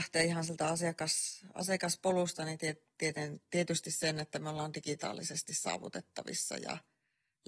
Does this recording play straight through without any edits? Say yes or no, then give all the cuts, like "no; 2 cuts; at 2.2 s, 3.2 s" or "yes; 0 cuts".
yes; 0 cuts